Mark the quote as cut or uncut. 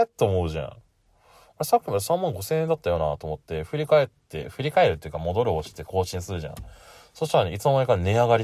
uncut